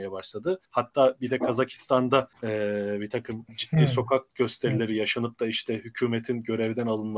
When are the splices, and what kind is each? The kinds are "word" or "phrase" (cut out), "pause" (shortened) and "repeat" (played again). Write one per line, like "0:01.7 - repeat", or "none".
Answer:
none